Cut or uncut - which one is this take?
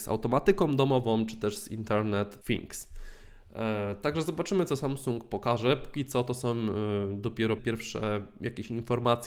cut